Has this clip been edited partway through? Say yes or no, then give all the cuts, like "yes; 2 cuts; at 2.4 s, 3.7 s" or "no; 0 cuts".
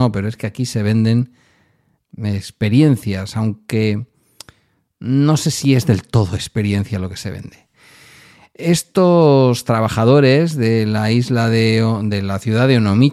no; 0 cuts